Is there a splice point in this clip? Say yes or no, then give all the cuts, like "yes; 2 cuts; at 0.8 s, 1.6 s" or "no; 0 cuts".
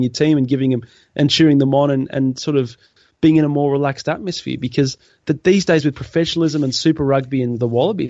no; 0 cuts